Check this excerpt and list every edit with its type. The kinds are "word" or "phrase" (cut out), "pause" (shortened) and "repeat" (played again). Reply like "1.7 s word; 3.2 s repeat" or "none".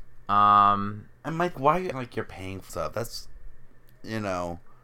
1.5 s phrase; 1.9 s word; 2.7 s phrase